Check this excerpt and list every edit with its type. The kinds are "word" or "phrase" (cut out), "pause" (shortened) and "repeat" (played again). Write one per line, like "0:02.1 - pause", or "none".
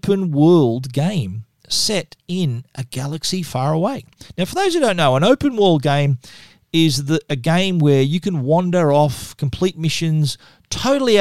0:03.5 - word